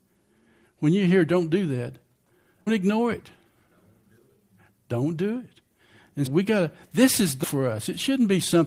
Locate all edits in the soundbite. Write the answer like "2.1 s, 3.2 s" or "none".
2.7 s, 6.3 s, 7.4 s